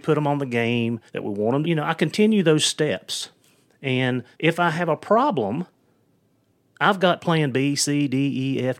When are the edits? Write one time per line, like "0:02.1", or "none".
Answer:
0:01.1
0:01.6
0:04.3